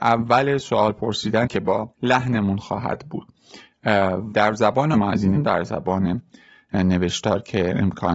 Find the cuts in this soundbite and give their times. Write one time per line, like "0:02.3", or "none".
0:01.5
0:01.9
0:04.3
0:04.9
0:05.4